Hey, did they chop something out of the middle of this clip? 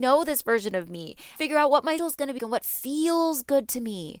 yes; 3 cuts; at 1.4 s, 2.0 s, 2.4 s

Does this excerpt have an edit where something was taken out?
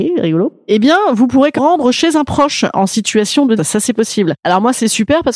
yes; 2 cuts; at 1.6 s, 3.6 s

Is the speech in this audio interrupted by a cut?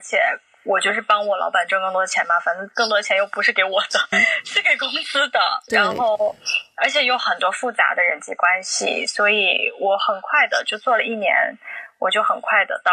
yes; 1 cut; at 4.1 s

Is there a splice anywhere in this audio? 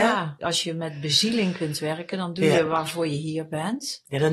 no; 0 cuts

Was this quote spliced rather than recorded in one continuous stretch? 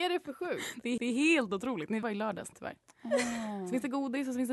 yes; 3 cuts; at 1.0 s, 2.0 s, 2.5 s

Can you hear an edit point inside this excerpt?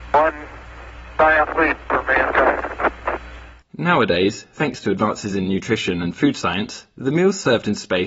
no; 0 cuts

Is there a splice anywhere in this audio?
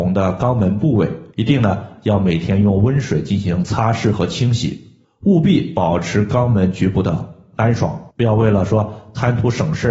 yes; 3 cuts; at 1.3 s, 5.0 s, 8.1 s

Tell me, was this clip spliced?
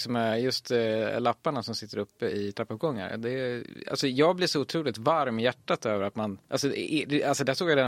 no; 0 cuts

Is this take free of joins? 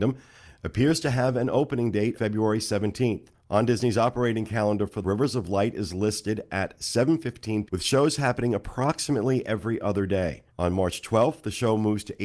no; 5 cuts; at 2.1 s, 3.3 s, 5.0 s, 7.7 s, 10.5 s

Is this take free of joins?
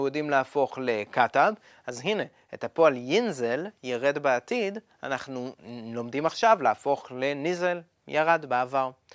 yes; 0 cuts

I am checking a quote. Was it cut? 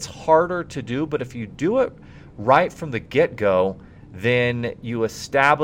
no; 0 cuts

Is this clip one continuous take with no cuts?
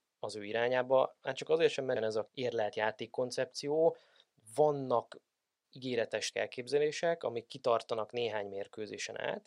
no; 4 cuts; at 2.0 s, 2.3 s, 5.6 s, 6.3 s

